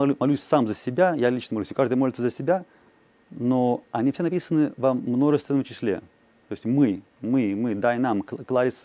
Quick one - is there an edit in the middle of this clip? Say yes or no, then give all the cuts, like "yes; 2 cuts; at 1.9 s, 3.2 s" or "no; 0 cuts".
no; 0 cuts